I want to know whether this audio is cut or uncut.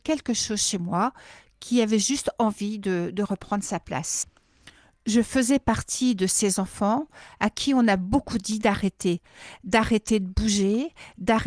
uncut